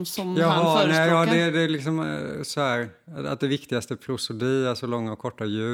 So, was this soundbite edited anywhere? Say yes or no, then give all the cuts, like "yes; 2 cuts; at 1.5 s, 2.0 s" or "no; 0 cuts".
no; 0 cuts